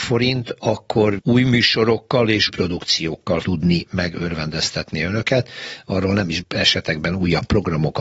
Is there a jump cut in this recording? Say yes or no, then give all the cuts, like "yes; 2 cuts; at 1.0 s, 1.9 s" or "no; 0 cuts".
yes; 4 cuts; at 1.2 s, 2.5 s, 3.4 s, 6.4 s